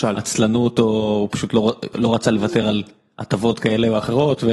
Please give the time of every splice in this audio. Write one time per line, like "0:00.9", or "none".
none